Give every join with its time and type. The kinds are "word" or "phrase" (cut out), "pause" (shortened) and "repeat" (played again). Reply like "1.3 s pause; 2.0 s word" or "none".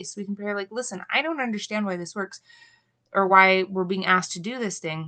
none